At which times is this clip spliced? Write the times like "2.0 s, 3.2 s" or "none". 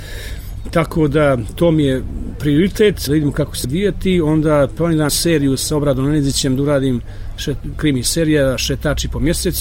3.1 s, 3.6 s, 5.1 s, 7.7 s